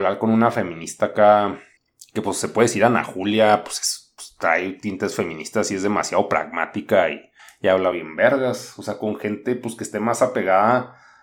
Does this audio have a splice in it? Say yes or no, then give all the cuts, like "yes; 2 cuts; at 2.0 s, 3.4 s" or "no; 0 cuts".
no; 0 cuts